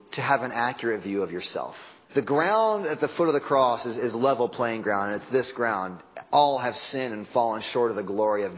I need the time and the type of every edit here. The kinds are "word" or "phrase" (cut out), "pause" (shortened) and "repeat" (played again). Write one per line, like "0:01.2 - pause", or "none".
0:02.0 - pause